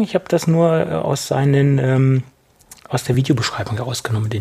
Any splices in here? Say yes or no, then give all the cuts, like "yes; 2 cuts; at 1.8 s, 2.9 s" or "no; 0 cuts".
no; 0 cuts